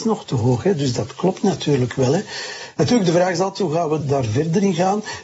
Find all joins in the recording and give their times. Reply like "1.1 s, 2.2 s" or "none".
4.0 s